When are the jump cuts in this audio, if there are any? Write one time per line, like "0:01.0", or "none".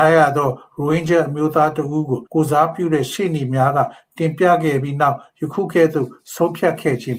0:02.3

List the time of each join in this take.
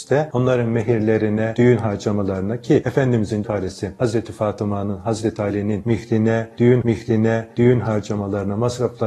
0:03.4
0:06.8

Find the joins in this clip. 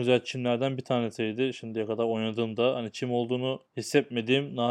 0:03.7

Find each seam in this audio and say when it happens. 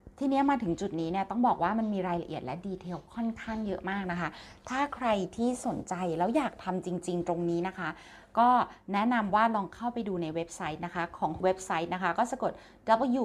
0:11.4

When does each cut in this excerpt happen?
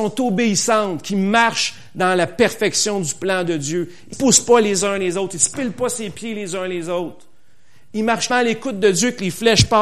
0:04.1
0:08.3

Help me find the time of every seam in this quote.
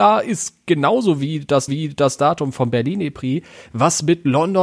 0:01.7

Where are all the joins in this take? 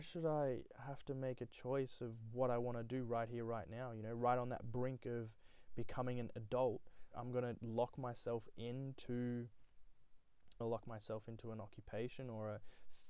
0:07.1
0:10.6

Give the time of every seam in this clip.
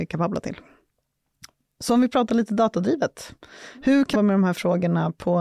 0:04.1

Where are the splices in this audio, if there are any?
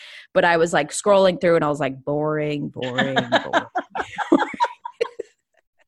none

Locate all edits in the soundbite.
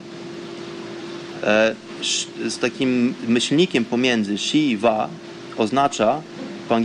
none

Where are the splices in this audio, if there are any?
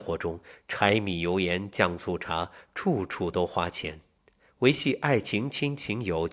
none

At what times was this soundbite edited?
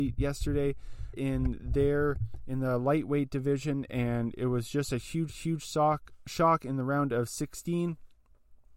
0:01.1
0:05.3

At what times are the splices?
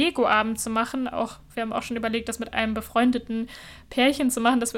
none

